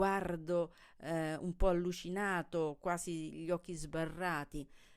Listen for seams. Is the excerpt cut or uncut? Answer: uncut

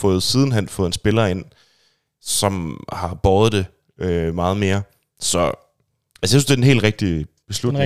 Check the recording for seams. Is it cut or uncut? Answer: uncut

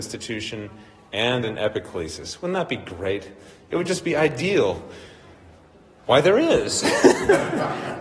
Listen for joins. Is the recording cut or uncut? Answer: uncut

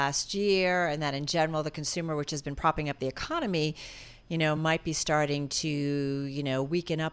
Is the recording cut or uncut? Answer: uncut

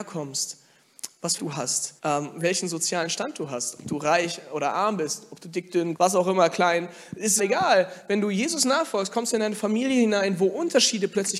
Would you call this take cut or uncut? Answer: cut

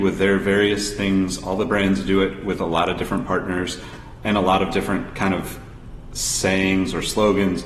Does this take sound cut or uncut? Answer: uncut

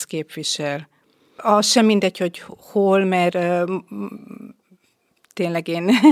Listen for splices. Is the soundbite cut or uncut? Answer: uncut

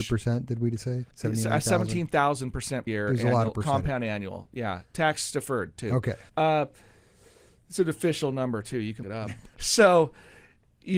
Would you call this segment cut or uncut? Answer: cut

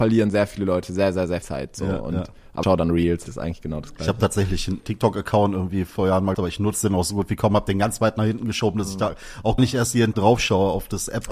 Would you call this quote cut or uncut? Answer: cut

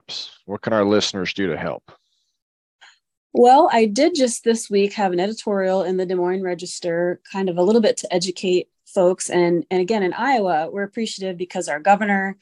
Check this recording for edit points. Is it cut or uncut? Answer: uncut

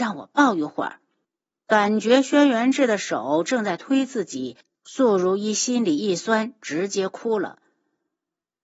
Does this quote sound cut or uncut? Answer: cut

